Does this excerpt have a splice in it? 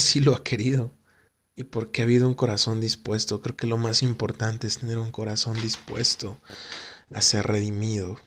yes; 1 cut; at 1.3 s

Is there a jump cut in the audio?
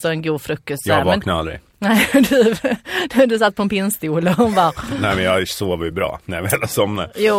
no; 0 cuts

